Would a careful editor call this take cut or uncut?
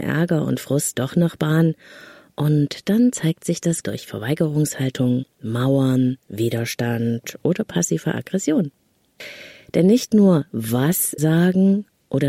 cut